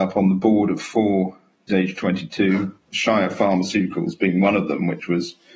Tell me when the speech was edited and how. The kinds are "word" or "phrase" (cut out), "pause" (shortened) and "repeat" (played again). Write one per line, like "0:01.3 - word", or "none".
0:01.7 - word
0:02.8 - pause